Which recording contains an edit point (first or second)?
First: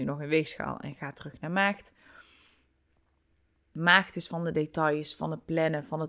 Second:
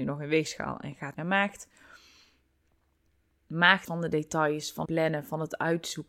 second